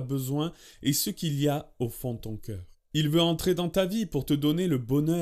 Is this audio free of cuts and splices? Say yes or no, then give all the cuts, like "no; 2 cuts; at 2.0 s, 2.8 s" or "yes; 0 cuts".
yes; 0 cuts